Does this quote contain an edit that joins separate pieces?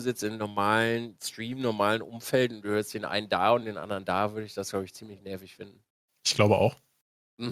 no; 0 cuts

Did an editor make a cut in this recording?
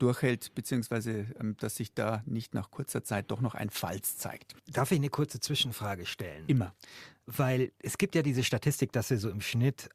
no; 0 cuts

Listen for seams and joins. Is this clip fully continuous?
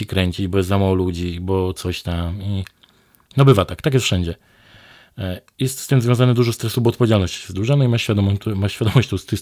yes; 0 cuts

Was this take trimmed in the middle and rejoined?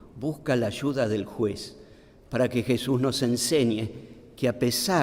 no; 0 cuts

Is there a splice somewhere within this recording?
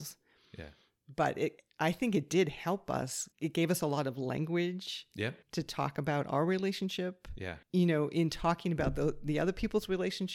yes; 3 cuts; at 3.3 s, 5.4 s, 7.6 s

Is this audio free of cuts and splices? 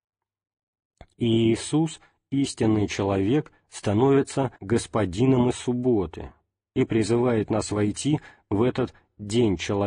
no; 1 cut; at 4.6 s

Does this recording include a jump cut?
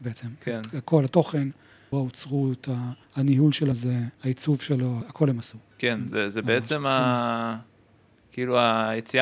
yes; 6 cuts; at 1.9 s, 3.0 s, 3.7 s, 4.1 s, 5.0 s, 5.7 s

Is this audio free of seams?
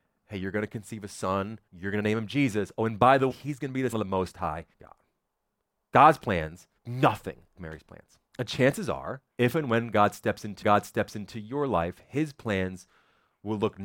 no; 9 cuts; at 1.7 s, 3.3 s, 3.9 s, 4.7 s, 6.8 s, 7.6 s, 8.3 s, 9.3 s, 10.6 s

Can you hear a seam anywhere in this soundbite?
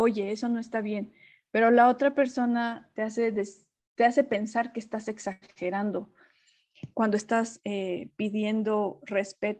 no; 0 cuts

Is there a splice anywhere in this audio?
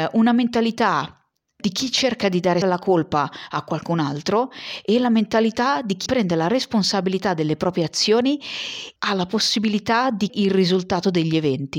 yes; 5 cuts; at 1.6 s, 2.6 s, 6.1 s, 9.0 s, 10.3 s

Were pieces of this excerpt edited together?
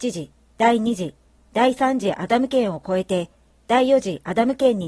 no; 0 cuts

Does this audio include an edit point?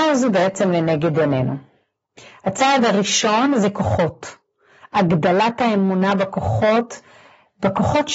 no; 0 cuts

